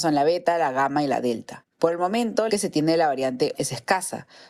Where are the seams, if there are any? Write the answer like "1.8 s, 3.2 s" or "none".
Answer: 1.7 s, 2.5 s, 3.5 s